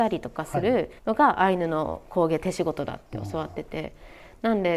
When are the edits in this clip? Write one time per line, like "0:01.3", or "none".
0:01.0